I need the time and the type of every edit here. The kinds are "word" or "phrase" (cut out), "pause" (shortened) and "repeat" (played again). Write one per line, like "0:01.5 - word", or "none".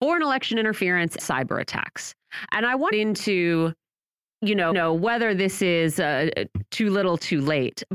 0:01.2 - word
0:02.9 - phrase
0:04.7 - repeat